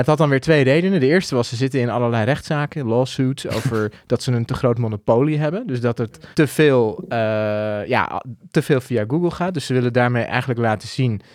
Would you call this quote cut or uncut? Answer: cut